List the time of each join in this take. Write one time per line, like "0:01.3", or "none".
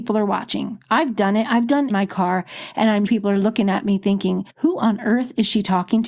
0:01.9
0:03.1
0:04.5